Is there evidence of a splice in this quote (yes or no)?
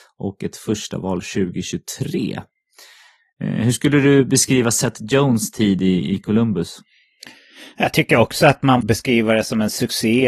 yes